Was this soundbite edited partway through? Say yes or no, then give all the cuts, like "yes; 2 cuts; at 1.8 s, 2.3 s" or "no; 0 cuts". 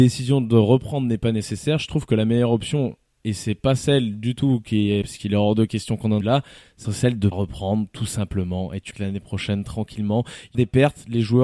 yes; 6 cuts; at 5.0 s, 6.2 s, 6.8 s, 7.3 s, 8.9 s, 10.5 s